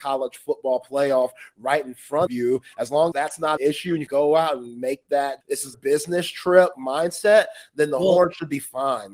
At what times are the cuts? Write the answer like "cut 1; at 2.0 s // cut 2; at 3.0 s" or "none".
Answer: cut 1; at 2.3 s // cut 2; at 3.1 s // cut 3; at 3.6 s // cut 4; at 4.1 s // cut 5; at 5.4 s // cut 6; at 5.7 s // cut 7; at 6.7 s